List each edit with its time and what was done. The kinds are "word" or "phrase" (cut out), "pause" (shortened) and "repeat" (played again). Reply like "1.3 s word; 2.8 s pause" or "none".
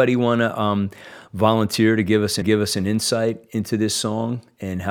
2.4 s repeat